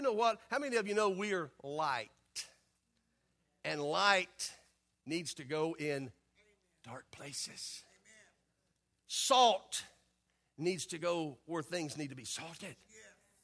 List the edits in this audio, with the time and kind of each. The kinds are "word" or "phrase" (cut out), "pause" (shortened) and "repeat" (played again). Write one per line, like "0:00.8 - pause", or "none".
none